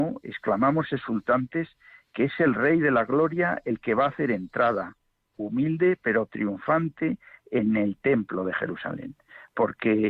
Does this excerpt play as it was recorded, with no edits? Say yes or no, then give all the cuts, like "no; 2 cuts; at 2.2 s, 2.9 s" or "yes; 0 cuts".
yes; 0 cuts